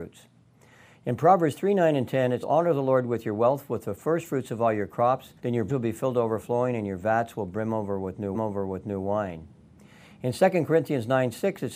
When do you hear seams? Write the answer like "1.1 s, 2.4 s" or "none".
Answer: 2.4 s, 5.4 s, 5.7 s, 8.3 s